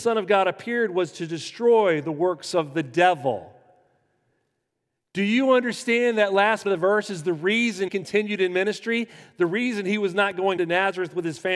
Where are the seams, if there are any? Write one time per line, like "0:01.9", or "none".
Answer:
0:06.6
0:07.9
0:10.6